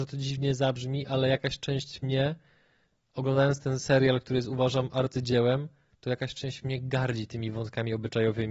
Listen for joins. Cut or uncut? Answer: uncut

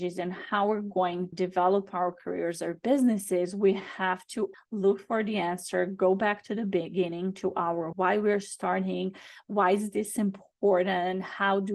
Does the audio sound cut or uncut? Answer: cut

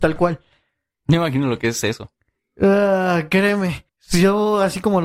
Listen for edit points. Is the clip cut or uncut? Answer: cut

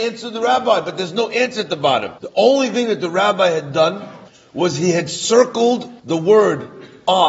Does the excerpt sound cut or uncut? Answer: cut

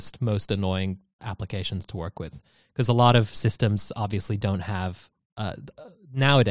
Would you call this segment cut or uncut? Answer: cut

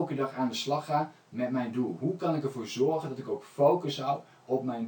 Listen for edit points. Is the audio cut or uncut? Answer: uncut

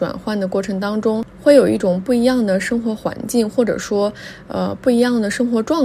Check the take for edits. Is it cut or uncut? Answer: uncut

